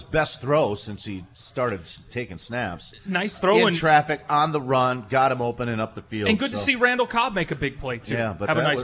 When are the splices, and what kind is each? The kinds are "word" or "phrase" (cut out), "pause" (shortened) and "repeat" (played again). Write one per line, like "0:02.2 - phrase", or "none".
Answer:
none

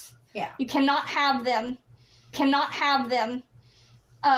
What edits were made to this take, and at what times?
0:02.3 - repeat

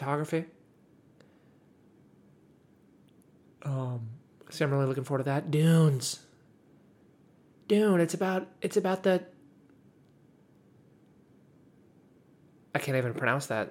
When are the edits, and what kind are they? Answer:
none

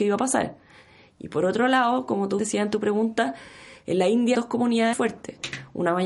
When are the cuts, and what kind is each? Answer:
0:02.4 - word
0:04.3 - word
0:04.9 - word

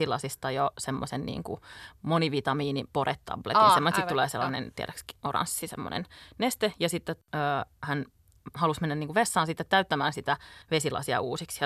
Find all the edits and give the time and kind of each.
0:10.6 - pause

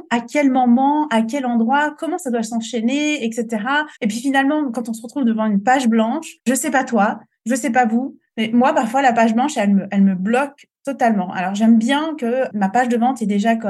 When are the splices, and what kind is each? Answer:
0:03.9 - pause
0:06.4 - pause

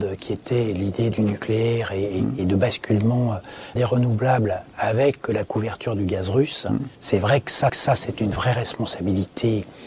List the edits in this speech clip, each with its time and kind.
0:01.1 - phrase
0:03.8 - word
0:06.9 - pause
0:07.7 - repeat

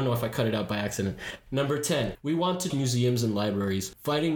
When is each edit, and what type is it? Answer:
0:02.7 - word

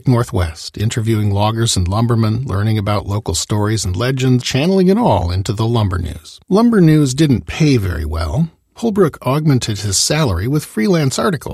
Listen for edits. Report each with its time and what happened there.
0:04.4 - word
0:06.4 - pause

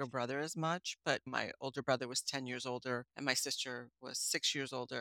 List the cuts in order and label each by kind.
0:03.1 - pause

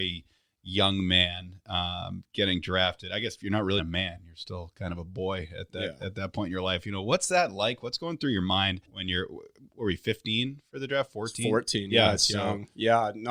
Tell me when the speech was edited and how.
0:03.8 - word
0:08.8 - pause

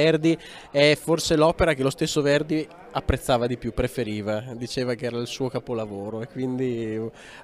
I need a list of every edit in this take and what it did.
none

